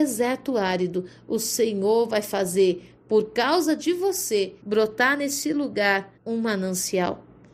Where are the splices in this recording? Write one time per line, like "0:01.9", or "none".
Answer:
0:04.6
0:06.1